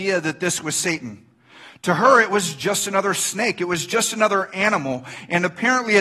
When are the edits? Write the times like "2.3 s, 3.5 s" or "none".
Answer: none

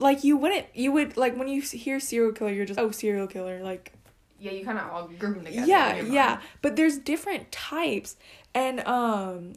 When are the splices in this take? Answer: 2.7 s, 5.2 s

